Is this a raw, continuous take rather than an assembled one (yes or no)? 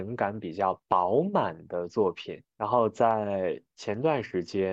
no